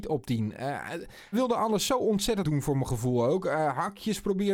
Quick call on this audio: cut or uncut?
cut